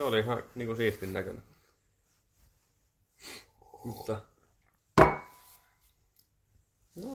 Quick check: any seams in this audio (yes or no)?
no